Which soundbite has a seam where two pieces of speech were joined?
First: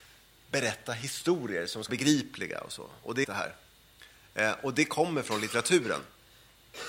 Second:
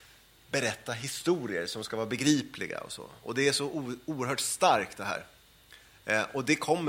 first; 2 cuts; at 1.9 s, 3.2 s

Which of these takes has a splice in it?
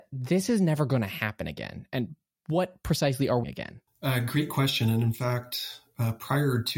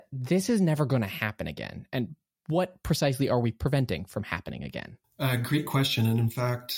first; 1 cut; at 3.4 s

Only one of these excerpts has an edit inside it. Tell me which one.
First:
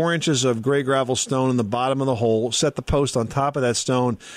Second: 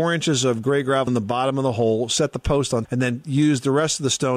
second; 2 cuts; at 1.1 s, 2.9 s

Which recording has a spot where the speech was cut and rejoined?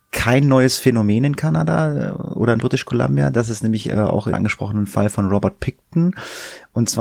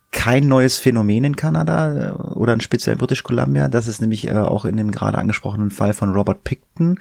first; 2 cuts; at 2.6 s, 4.3 s

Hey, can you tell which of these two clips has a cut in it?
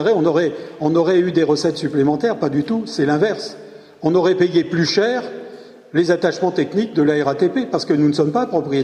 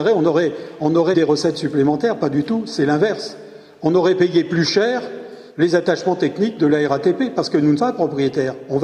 second; 3 cuts; at 1.1 s, 5.5 s, 7.8 s

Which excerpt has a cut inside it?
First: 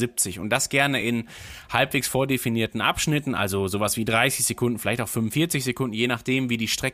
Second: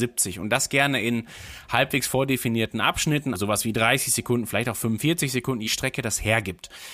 second; 2 cuts; at 3.3 s, 5.7 s

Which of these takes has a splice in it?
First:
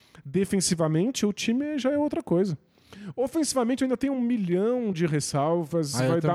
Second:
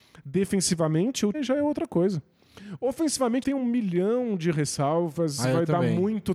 second; 2 cuts; at 1.3 s, 3.4 s

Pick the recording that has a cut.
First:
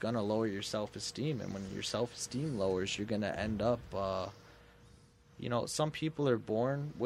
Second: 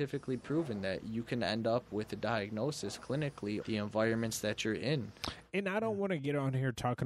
second; 1 cut; at 3.6 s

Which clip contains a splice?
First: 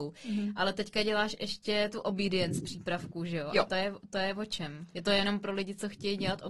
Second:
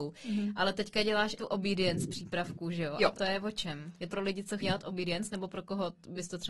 second; 4 cuts; at 1.4 s, 3.1 s, 4.1 s, 4.6 s

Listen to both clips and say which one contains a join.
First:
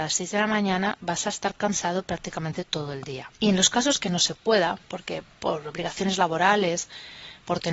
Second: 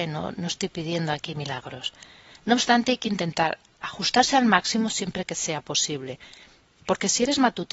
first; 1 cut; at 3.3 s

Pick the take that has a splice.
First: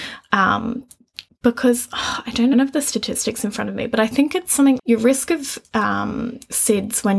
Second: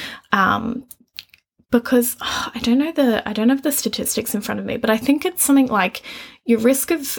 first; 3 cuts; at 1.3 s, 2.5 s, 4.8 s

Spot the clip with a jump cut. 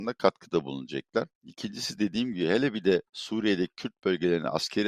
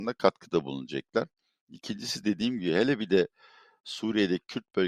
first; 2 cuts; at 1.3 s, 3.1 s

